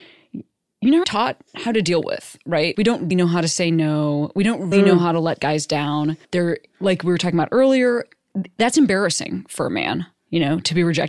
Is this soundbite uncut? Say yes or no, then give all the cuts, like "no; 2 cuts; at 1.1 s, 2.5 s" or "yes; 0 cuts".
no; 6 cuts; at 1.0 s, 1.5 s, 2.7 s, 3.1 s, 4.7 s, 6.2 s